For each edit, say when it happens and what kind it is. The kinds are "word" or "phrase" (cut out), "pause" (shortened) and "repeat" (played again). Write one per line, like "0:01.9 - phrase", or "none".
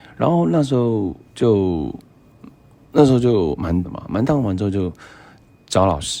0:03.8 - word